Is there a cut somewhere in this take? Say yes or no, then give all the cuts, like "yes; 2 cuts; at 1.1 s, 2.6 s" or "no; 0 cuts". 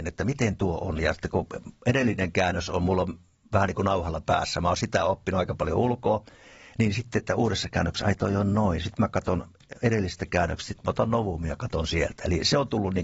no; 0 cuts